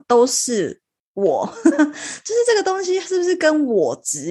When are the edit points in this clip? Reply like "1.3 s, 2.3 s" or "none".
none